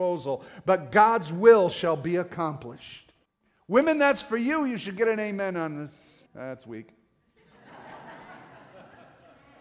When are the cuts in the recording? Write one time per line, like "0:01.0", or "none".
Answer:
0:03.3
0:06.3